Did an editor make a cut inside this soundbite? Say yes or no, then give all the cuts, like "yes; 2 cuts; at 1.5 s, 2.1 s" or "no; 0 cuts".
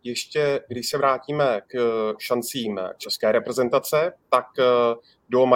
yes; 1 cut; at 1.6 s